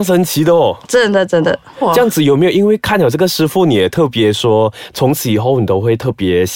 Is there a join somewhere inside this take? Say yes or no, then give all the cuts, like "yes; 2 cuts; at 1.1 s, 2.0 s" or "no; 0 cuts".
no; 0 cuts